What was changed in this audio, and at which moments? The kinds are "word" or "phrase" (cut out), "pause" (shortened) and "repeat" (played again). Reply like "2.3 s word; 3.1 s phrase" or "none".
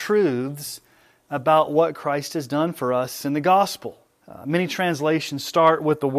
4.1 s pause